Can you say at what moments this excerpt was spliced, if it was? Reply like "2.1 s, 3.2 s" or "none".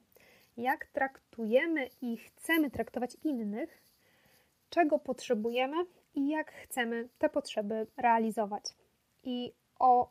none